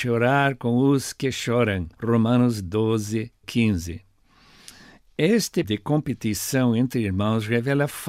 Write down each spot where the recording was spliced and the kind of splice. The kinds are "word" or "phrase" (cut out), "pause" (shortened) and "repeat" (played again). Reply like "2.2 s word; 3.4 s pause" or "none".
1.9 s pause; 3.4 s word; 5.6 s word